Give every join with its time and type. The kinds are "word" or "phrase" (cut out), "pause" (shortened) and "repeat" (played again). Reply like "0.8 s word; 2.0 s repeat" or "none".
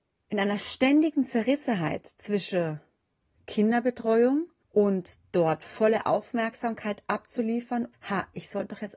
4.6 s pause; 7.9 s word